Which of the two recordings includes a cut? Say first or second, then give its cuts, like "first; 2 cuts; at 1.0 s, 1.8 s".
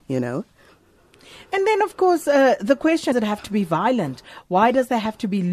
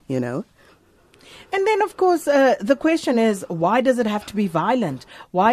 first; 1 cut; at 3.1 s